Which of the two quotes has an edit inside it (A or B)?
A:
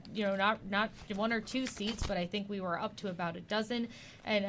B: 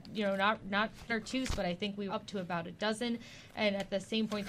B